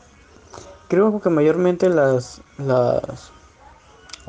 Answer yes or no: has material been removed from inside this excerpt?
no